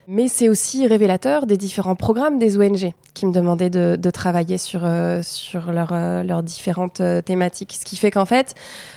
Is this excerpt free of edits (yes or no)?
yes